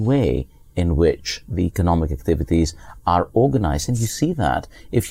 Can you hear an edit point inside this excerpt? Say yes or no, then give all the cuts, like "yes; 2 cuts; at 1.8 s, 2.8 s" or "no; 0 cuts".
no; 0 cuts